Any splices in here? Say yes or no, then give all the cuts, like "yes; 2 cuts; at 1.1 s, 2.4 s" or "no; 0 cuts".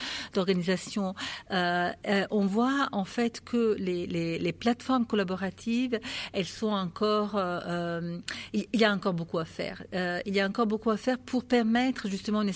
no; 0 cuts